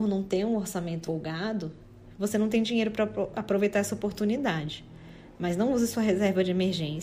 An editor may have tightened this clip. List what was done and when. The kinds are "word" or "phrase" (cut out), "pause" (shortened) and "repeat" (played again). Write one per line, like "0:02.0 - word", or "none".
0:01.0 - word